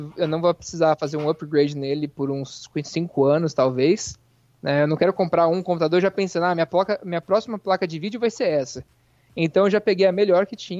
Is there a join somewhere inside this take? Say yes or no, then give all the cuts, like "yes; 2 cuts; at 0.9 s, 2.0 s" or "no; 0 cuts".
no; 0 cuts